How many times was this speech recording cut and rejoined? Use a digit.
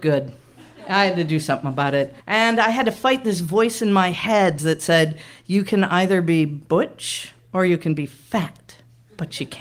2